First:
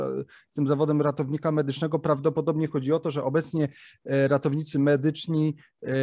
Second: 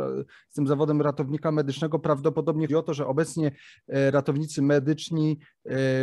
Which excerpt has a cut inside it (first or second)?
second